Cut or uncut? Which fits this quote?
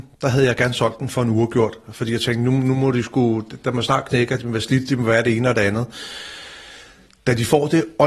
uncut